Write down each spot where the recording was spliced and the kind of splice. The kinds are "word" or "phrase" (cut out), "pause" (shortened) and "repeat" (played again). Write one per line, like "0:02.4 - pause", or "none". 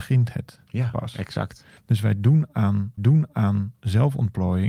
0:03.0 - repeat